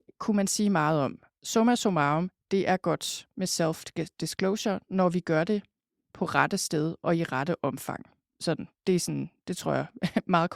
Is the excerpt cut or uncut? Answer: uncut